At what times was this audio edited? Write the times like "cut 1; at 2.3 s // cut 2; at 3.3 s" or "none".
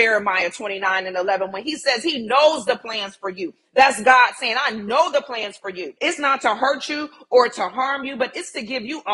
cut 1; at 6.0 s